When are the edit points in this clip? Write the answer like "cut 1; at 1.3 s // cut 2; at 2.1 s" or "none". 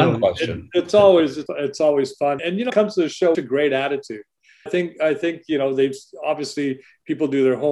cut 1; at 1.5 s // cut 2; at 2.4 s // cut 3; at 2.7 s // cut 4; at 3.3 s // cut 5; at 4.7 s